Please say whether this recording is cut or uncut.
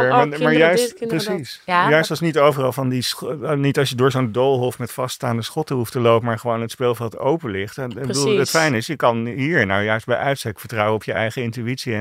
uncut